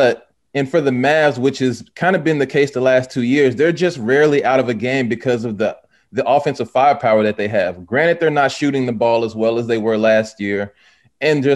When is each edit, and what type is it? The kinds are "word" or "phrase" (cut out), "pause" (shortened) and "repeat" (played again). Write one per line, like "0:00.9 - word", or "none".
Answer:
none